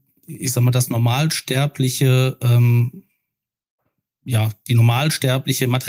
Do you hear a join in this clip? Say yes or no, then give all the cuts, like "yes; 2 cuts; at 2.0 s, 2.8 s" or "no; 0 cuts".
no; 0 cuts